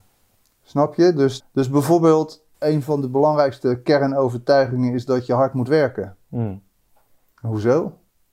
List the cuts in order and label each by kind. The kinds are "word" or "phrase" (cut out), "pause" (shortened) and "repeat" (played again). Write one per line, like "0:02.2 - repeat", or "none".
0:01.4 - word

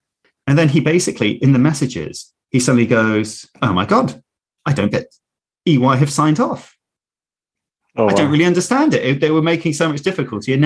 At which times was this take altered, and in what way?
0:02.4 - pause
0:03.5 - pause
0:04.4 - pause
0:04.9 - word

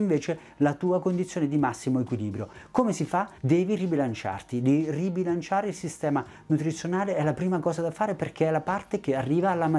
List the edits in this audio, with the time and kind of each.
0:03.4 - pause

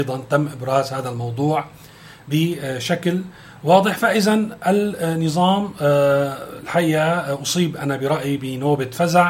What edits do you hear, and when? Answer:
none

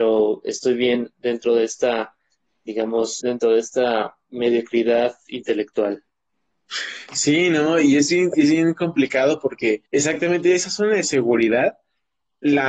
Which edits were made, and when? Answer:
0:03.2 - word
0:09.9 - pause

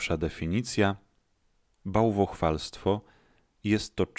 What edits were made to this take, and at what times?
none

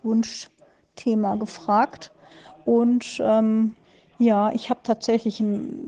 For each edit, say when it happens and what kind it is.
0:03.8 - pause

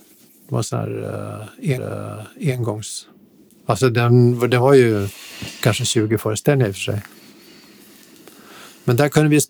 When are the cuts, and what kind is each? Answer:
0:01.8 - repeat

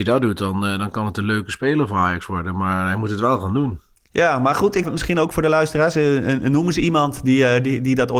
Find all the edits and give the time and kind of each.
0:04.8 - word

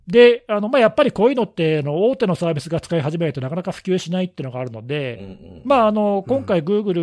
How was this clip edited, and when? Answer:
none

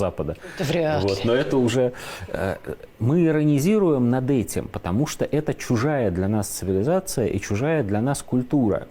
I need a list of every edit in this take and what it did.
none

